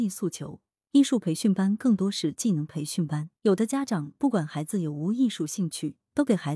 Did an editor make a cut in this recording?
yes; 1 cut; at 3.4 s

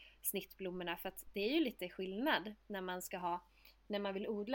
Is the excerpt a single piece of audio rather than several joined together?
yes; 0 cuts

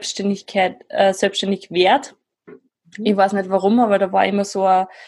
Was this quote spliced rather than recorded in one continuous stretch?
no; 0 cuts

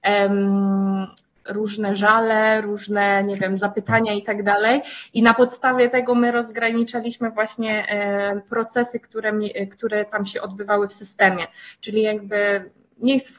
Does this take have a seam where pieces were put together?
no; 0 cuts

